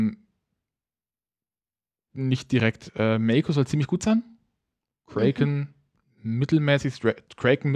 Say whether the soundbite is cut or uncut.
uncut